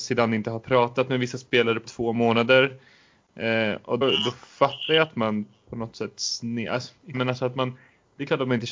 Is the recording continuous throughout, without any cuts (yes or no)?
no